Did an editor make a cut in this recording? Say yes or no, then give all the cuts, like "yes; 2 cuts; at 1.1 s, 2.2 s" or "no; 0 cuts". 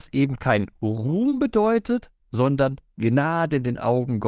yes; 1 cut; at 2.2 s